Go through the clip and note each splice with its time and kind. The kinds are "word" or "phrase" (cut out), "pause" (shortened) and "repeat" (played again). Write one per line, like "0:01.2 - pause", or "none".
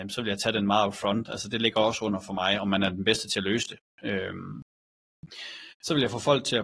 0:05.7 - pause